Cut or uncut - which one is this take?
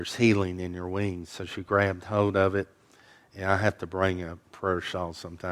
uncut